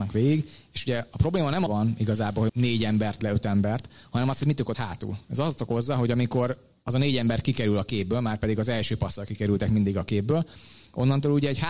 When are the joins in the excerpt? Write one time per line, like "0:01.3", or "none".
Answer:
0:01.7
0:02.5
0:03.2
0:04.7